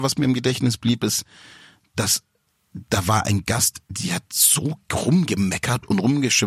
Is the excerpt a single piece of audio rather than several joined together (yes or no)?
yes